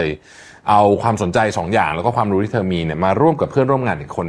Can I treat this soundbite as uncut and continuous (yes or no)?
yes